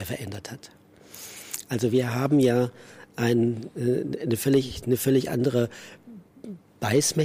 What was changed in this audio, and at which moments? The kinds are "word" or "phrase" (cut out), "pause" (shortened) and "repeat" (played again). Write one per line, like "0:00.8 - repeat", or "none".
none